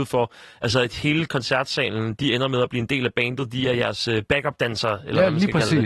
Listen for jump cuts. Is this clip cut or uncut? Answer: uncut